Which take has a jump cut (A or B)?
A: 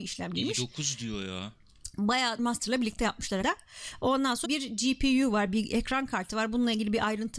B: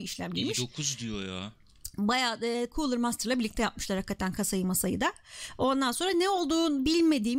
A